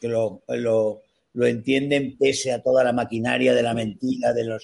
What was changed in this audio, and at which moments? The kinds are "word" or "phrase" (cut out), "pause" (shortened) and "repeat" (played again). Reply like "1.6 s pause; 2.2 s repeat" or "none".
none